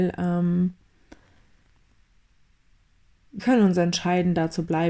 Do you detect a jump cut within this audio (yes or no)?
yes